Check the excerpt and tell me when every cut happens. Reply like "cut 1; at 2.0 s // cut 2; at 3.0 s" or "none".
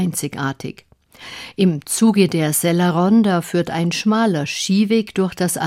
none